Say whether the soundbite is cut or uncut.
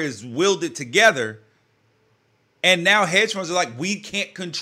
uncut